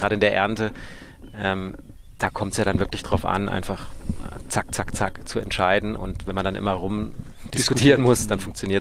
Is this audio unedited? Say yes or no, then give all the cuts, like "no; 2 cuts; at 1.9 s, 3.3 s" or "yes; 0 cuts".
yes; 0 cuts